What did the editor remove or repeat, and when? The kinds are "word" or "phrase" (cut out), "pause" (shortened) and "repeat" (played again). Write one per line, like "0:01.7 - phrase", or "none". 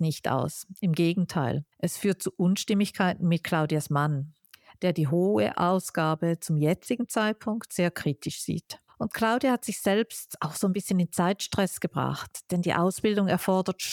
0:01.7 - pause
0:08.9 - pause